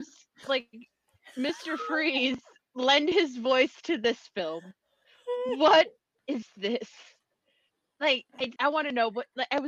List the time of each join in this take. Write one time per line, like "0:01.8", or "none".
0:08.6

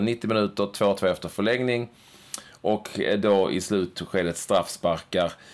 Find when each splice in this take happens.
none

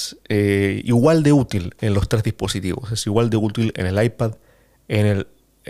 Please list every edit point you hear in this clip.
none

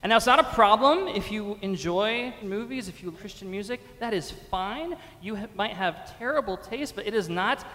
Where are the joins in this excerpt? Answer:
0:02.4
0:03.1

